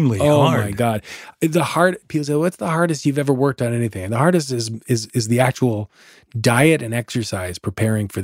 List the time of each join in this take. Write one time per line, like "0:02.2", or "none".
none